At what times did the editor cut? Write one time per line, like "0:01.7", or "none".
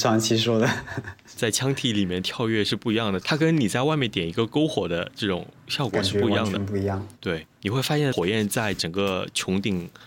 0:01.3
0:07.1

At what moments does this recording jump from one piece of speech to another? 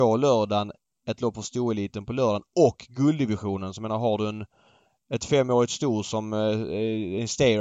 none

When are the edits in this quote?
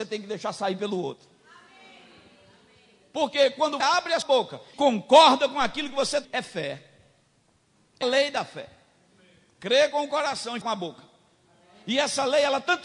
0:03.8
0:04.2
0:04.7
0:06.2
0:08.0
0:10.6

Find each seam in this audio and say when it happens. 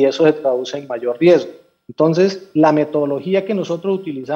none

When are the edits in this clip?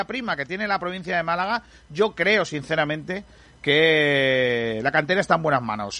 none

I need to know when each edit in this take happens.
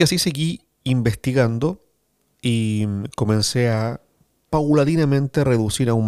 none

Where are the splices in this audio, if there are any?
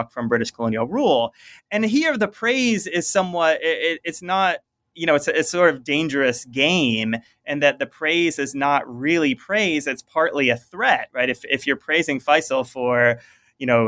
none

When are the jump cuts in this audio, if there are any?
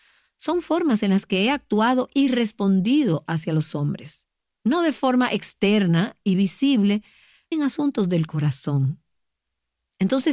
0:07.5

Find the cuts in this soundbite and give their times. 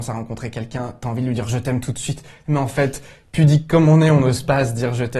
none

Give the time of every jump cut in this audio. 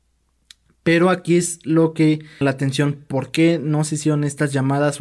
0:02.4

